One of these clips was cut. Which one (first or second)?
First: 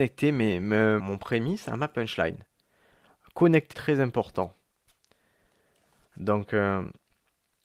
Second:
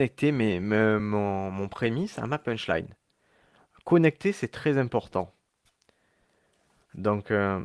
first